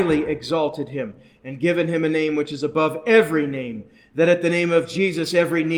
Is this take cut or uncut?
uncut